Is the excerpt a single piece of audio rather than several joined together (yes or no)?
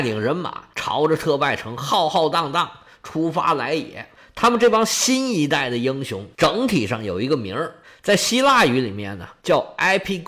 yes